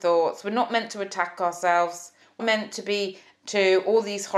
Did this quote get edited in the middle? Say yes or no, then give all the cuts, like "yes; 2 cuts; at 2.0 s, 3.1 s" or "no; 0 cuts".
yes; 2 cuts; at 2.4 s, 3.3 s